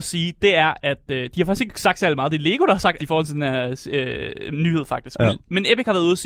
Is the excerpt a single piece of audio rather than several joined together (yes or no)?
no